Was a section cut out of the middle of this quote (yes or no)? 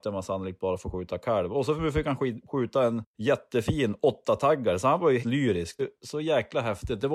yes